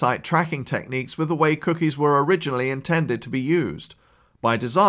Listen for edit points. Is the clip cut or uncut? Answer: uncut